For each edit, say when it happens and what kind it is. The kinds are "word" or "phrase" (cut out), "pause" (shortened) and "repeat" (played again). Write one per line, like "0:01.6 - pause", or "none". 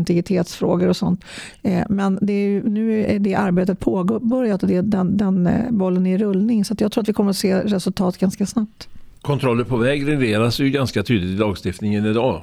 none